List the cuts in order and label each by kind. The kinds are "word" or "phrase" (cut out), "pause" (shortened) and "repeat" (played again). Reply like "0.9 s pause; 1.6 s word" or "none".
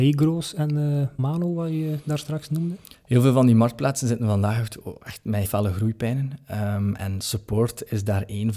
1.2 s word; 5.4 s word; 7.0 s word

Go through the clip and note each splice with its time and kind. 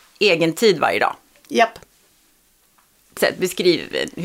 3.2 s word

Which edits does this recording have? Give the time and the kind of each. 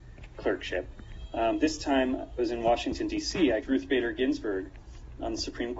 2.4 s word; 3.6 s phrase

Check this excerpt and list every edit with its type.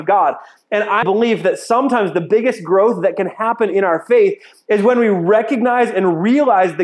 1.0 s word

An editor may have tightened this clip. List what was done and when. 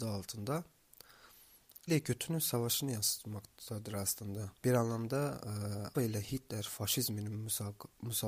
1.9 s word; 4.6 s pause; 5.9 s word

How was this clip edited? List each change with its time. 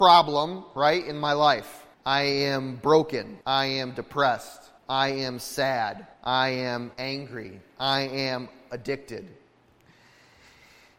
1.9 s pause; 3.4 s pause; 4.8 s pause; 6.1 s pause; 6.9 s pause

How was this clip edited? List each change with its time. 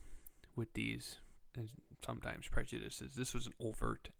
1.5 s phrase

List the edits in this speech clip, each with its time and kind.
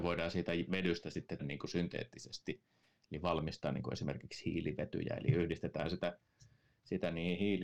1.4 s word

